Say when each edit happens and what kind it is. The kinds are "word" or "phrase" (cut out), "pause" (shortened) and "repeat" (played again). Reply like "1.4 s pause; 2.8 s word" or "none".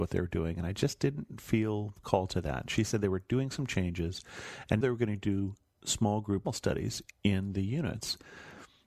4.8 s word; 6.4 s word